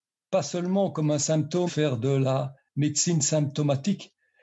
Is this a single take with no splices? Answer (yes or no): no